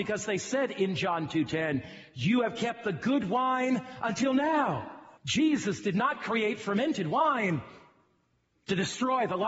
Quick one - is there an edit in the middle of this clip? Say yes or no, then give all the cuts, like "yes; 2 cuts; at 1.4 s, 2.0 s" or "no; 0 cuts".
yes; 1 cut; at 5.2 s